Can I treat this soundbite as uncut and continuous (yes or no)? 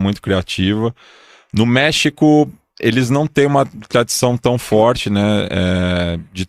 yes